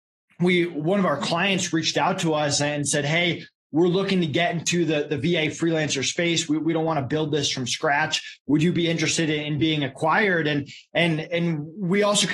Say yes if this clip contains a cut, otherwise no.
no